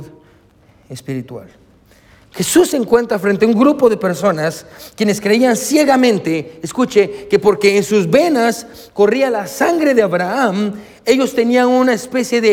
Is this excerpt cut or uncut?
uncut